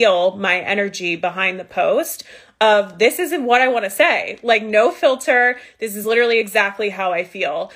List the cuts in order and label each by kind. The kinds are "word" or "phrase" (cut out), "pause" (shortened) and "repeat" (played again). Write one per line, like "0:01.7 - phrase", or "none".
none